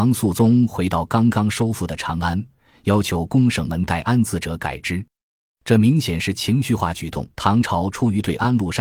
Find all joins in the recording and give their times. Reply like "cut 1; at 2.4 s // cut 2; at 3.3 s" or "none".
cut 1; at 7.3 s